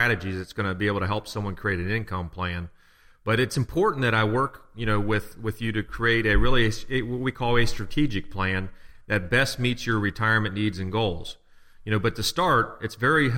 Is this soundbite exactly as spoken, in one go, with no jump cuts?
yes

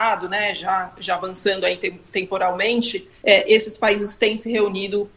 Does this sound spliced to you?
yes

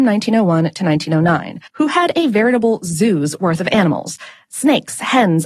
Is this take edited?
yes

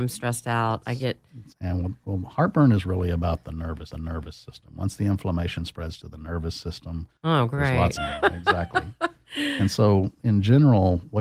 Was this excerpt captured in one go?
no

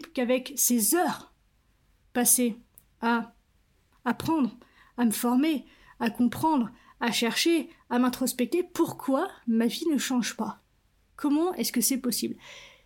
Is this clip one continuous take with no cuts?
yes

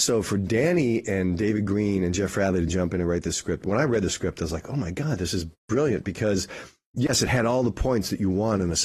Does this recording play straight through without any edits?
yes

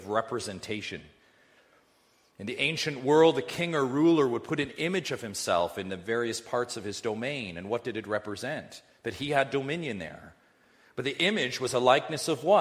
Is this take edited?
no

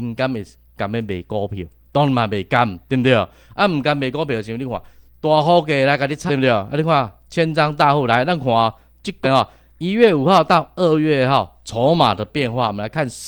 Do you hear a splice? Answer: yes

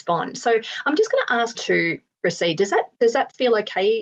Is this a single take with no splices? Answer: no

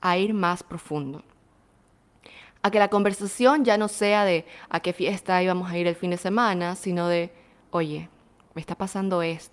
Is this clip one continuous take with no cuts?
yes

